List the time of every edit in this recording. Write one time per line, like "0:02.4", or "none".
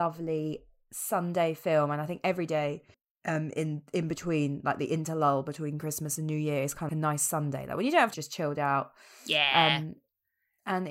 0:02.9
0:06.9
0:08.1